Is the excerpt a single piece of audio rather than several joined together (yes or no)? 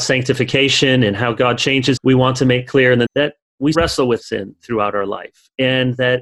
no